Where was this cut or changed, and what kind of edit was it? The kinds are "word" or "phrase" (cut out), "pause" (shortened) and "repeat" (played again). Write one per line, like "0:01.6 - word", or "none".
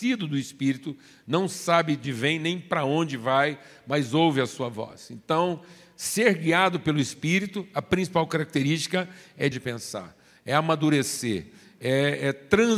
0:02.0 - word
0:09.5 - phrase